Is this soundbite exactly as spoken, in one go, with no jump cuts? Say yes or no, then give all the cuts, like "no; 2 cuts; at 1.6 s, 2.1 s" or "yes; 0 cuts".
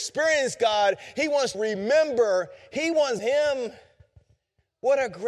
no; 2 cuts; at 1.5 s, 3.2 s